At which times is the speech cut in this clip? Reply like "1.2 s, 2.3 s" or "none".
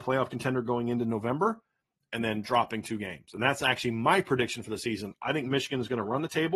none